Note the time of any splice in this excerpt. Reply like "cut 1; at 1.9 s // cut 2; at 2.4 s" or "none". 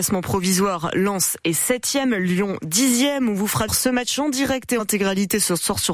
cut 1; at 3.7 s // cut 2; at 4.8 s